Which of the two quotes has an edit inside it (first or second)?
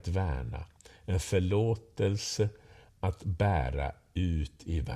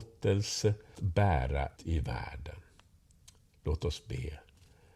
second